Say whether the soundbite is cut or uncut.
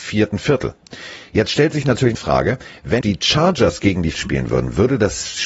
cut